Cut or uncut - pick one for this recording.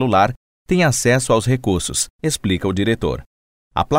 cut